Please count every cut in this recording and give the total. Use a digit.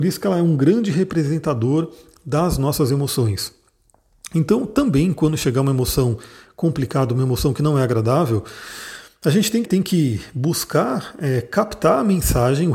1